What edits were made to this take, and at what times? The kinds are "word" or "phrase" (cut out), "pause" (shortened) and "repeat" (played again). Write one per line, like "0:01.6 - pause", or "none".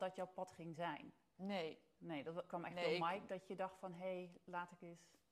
none